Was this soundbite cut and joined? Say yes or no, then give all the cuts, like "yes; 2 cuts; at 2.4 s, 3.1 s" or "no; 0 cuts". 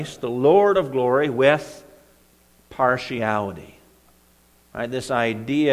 no; 0 cuts